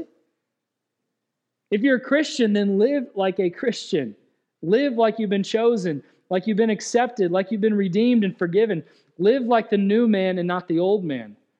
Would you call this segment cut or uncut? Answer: uncut